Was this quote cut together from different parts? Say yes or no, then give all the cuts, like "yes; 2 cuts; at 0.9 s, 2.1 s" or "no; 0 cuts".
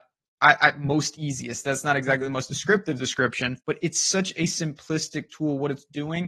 yes; 1 cut; at 3.6 s